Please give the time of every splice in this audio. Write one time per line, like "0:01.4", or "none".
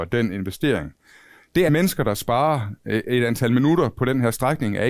0:01.7